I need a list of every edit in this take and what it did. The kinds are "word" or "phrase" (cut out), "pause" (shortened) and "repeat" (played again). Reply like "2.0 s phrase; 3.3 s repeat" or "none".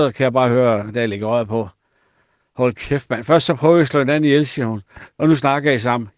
none